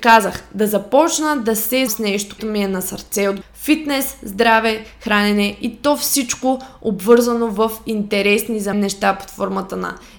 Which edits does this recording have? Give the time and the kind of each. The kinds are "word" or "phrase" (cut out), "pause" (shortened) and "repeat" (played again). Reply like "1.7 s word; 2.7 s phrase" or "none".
1.9 s word; 2.4 s word; 3.4 s word; 8.7 s word